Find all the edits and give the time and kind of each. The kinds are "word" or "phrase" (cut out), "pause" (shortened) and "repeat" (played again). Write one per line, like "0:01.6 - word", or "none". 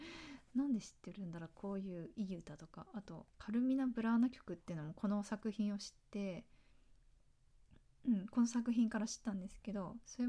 0:03.3 - pause